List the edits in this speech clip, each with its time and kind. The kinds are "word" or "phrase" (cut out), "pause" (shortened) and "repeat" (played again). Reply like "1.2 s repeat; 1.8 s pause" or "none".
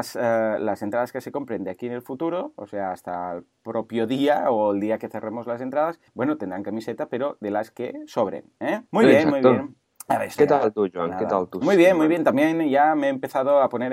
6.1 s pause; 8.9 s pause; 10.4 s word